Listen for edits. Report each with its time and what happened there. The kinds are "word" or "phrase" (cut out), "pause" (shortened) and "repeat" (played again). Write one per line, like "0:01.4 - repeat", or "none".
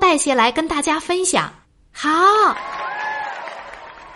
0:01.6 - pause